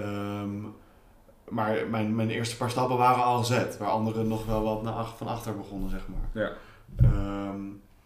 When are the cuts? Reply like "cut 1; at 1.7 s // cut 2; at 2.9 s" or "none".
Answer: none